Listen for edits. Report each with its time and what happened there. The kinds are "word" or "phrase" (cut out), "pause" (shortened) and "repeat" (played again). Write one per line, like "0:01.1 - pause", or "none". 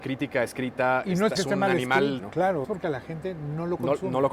0:01.4 - word
0:02.2 - word
0:02.6 - word